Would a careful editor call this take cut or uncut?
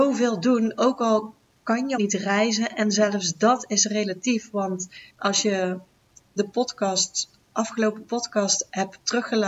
cut